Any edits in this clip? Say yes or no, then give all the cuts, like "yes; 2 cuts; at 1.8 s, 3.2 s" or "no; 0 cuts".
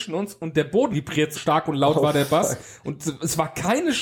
yes; 2 cuts; at 0.9 s, 1.3 s